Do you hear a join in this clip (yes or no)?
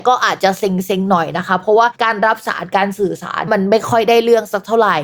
yes